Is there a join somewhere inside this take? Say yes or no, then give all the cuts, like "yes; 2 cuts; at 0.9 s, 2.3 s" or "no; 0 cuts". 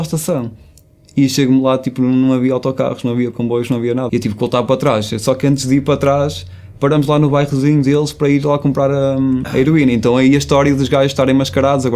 yes; 1 cut; at 4.1 s